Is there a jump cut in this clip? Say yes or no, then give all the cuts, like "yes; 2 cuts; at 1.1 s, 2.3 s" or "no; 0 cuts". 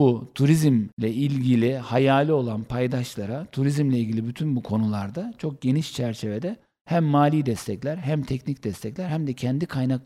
no; 0 cuts